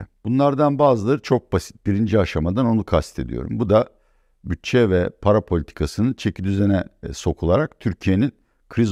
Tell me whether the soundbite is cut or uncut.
uncut